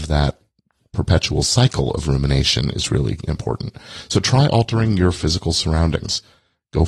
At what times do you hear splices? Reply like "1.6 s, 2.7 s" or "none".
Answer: none